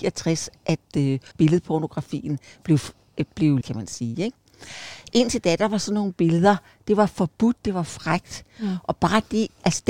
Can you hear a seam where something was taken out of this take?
yes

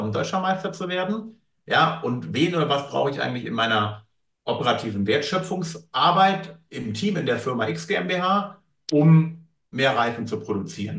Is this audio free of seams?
yes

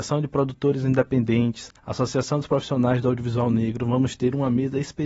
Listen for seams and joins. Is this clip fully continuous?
no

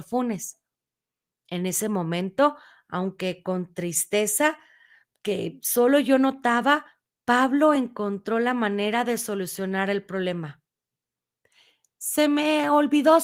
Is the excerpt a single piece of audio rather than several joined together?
yes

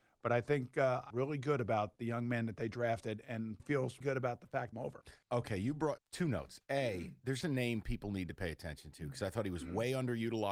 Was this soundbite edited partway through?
yes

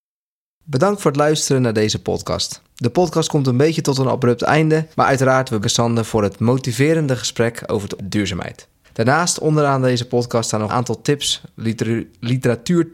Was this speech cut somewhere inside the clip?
yes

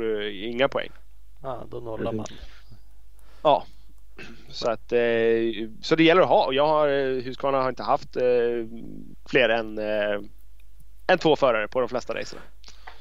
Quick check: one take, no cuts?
yes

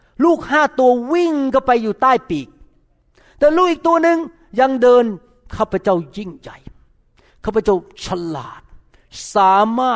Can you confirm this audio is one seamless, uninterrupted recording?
yes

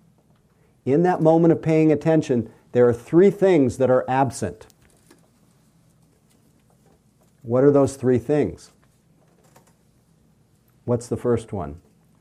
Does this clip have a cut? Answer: no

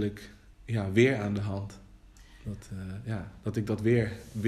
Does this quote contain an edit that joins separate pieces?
no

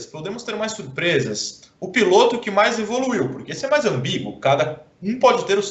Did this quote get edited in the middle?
no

